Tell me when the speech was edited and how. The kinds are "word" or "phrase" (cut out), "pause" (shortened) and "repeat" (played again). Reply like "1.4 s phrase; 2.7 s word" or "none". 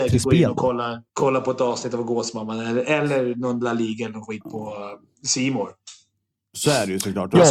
1.1 s pause